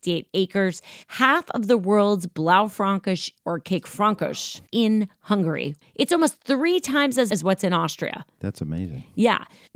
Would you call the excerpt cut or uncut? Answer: cut